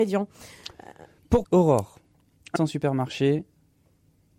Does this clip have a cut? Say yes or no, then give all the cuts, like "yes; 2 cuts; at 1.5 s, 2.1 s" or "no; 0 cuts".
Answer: yes; 2 cuts; at 1.4 s, 2.6 s